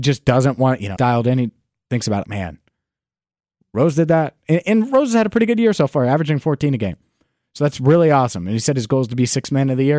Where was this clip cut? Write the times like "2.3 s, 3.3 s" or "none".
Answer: 1.0 s, 2.2 s